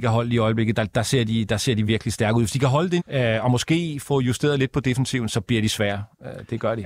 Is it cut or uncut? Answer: cut